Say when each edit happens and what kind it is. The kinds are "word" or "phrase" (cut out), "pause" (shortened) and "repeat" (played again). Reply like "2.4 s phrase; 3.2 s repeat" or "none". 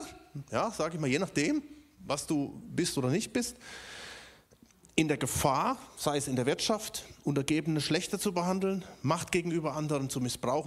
none